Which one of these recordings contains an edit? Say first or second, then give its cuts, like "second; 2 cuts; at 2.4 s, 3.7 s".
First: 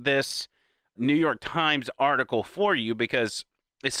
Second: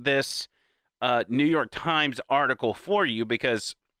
first; 1 cut; at 1.0 s